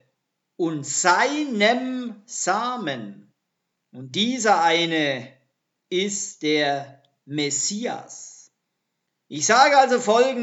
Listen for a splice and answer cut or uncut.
uncut